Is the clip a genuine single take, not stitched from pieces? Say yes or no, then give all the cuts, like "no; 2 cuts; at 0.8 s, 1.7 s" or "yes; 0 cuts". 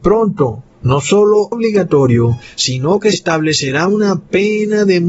no; 2 cuts; at 1.5 s, 3.1 s